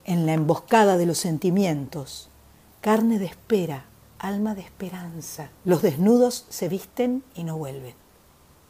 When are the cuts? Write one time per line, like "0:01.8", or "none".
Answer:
0:05.6